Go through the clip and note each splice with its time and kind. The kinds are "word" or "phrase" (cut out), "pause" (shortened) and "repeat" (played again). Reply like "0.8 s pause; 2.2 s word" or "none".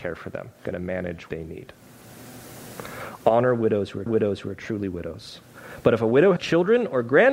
1.3 s word; 4.1 s repeat; 6.4 s word